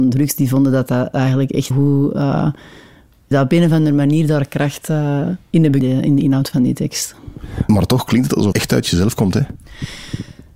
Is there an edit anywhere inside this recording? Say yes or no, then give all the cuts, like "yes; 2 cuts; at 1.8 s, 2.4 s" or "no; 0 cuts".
yes; 4 cuts; at 1.7 s, 3.3 s, 5.8 s, 8.5 s